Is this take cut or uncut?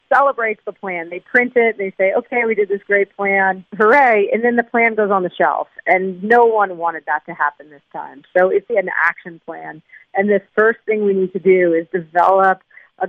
cut